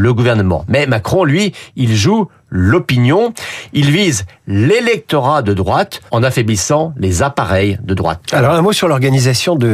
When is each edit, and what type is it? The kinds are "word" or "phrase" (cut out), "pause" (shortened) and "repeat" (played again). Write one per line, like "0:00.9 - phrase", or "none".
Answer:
0:06.1 - pause